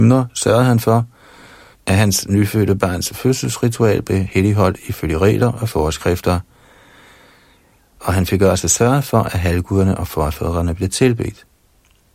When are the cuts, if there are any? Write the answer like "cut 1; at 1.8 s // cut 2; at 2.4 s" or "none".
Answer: none